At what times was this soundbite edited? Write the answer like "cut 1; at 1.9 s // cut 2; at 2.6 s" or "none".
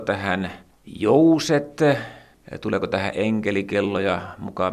none